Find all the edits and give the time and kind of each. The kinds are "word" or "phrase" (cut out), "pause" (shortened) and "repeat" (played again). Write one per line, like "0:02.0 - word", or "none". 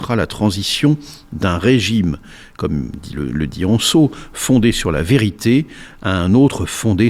none

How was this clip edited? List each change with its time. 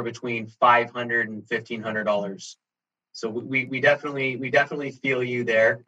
none

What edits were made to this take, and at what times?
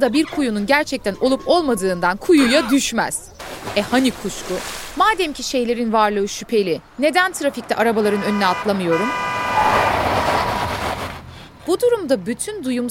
0:02.2 - phrase
0:06.9 - pause

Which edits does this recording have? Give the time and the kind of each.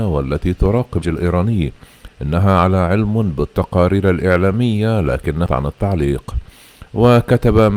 0:01.0 - word
0:02.1 - pause
0:05.5 - word

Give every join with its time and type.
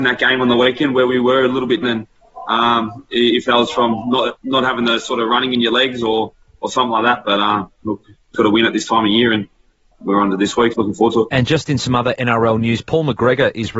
0:01.8 - word
0:08.3 - word
0:09.9 - word
0:10.7 - word

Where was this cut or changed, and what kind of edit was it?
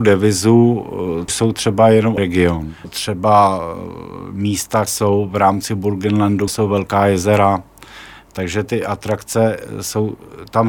0:01.3 - word
0:02.2 - word
0:02.8 - word
0:04.9 - word
0:06.5 - word
0:08.7 - word

